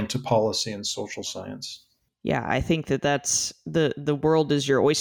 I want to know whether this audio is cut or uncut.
uncut